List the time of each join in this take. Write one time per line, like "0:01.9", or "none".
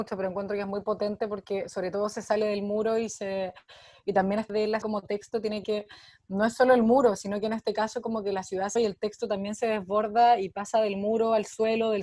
0:04.5
0:04.8
0:05.6
0:08.8